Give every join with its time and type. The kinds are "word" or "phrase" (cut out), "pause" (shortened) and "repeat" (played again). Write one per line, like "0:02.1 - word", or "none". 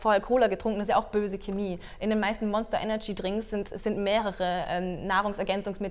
none